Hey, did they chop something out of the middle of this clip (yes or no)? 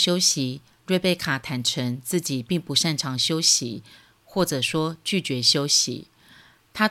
no